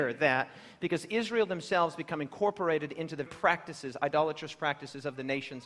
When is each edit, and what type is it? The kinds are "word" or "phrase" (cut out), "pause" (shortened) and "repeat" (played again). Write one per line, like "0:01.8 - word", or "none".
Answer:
0:03.3 - word

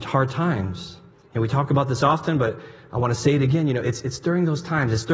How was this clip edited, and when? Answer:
0:01.1 - pause

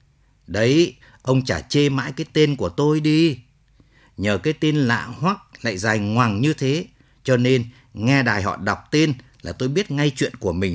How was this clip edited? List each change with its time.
none

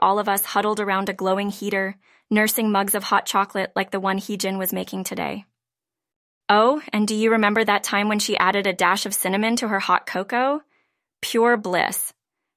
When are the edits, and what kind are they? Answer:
none

